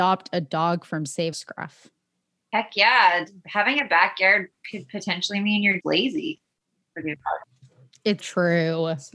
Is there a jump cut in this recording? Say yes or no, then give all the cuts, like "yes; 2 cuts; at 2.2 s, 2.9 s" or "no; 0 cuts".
yes; 3 cuts; at 1.3 s, 5.8 s, 8.2 s